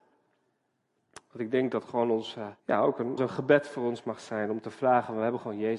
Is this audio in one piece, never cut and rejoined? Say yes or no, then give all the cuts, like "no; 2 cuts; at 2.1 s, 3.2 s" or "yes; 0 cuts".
no; 2 cuts; at 2.6 s, 3.2 s